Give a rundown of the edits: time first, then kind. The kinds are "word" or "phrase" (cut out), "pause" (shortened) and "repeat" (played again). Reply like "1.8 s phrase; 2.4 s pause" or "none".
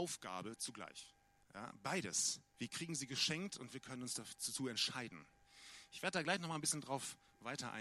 1.2 s pause